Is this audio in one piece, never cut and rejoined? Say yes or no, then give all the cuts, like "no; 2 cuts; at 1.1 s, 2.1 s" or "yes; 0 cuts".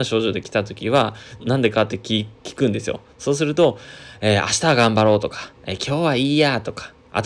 no; 1 cut; at 1.4 s